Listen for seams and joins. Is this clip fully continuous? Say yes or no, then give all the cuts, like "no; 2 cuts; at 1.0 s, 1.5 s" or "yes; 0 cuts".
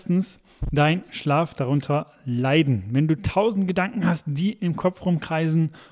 yes; 0 cuts